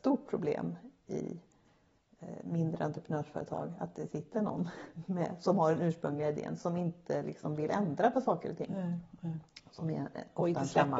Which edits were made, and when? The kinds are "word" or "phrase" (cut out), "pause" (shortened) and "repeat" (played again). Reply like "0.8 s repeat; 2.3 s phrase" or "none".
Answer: none